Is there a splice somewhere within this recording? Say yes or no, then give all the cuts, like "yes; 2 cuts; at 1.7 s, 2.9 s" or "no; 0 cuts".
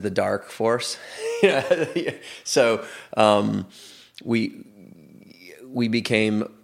no; 0 cuts